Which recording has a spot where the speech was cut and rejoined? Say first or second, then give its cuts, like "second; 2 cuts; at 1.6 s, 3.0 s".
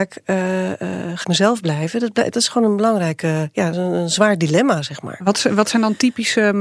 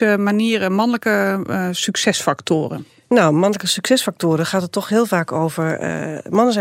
first; 2 cuts; at 1.2 s, 3.7 s